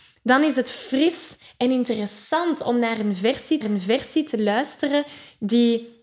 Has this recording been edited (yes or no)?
yes